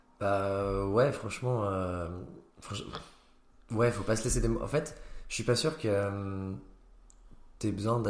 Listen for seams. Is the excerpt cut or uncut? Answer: cut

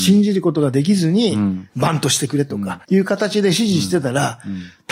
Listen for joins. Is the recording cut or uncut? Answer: cut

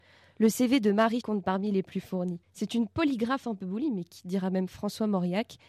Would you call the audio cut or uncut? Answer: cut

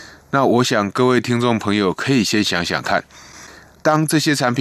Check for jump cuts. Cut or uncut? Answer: uncut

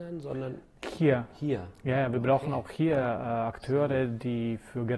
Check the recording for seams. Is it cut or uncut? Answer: uncut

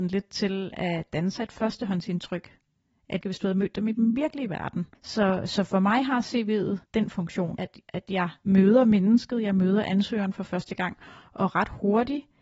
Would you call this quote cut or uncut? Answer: cut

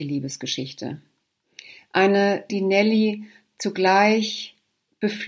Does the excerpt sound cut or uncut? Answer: cut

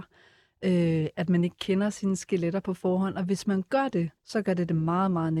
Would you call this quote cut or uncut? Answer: cut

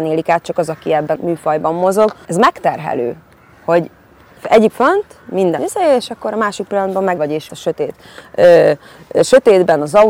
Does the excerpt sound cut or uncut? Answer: cut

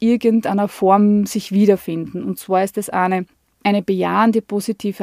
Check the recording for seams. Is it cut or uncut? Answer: uncut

